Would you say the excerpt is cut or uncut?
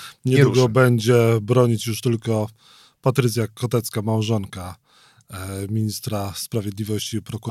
uncut